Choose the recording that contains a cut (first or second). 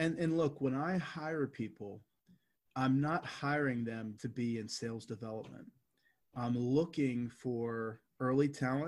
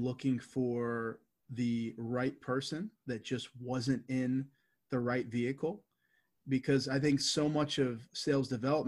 first